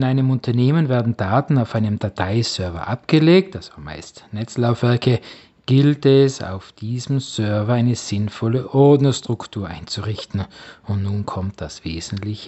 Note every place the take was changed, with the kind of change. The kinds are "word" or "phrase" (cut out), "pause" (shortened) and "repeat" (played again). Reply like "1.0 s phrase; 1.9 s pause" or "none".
none

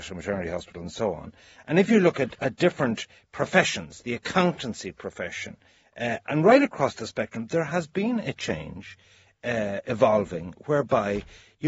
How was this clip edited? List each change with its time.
none

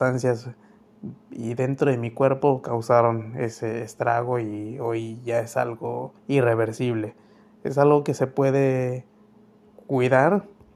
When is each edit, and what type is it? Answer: 6.2 s pause

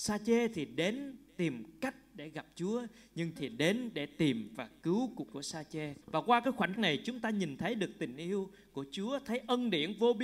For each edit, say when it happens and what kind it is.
3.4 s word; 5.3 s word; 6.0 s pause; 6.7 s word

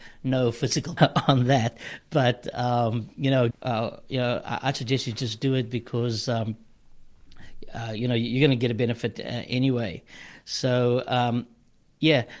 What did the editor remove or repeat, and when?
1.0 s word; 3.5 s word

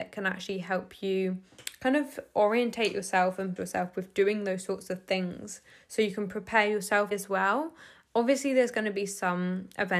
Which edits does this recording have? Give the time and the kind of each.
3.6 s word; 7.1 s word

